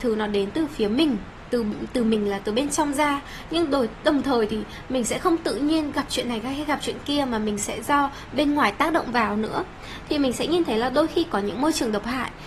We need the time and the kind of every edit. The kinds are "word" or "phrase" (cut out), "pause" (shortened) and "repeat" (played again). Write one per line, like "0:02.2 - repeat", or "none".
none